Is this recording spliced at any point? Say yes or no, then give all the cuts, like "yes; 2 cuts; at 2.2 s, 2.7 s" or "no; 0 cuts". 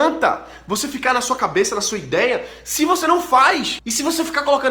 no; 0 cuts